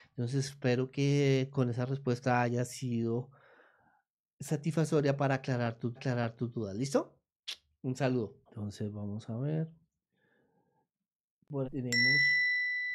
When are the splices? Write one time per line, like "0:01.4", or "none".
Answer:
0:06.0
0:08.5
0:11.6